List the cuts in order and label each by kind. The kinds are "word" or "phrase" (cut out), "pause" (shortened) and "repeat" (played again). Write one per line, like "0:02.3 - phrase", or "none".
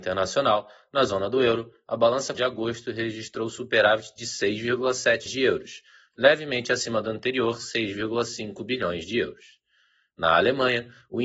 0:02.3 - word
0:05.3 - word